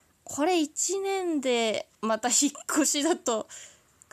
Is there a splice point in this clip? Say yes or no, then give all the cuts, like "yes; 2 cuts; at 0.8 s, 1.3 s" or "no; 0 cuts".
yes; 1 cut; at 1.9 s